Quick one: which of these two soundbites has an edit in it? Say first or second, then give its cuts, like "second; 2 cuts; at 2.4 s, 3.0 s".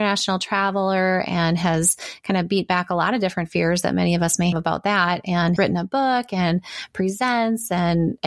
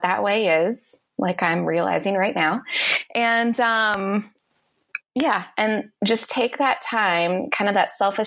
first; 2 cuts; at 4.5 s, 5.6 s